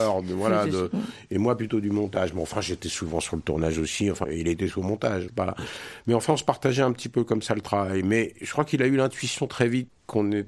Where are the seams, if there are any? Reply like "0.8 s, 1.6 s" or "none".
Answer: 4.2 s, 5.3 s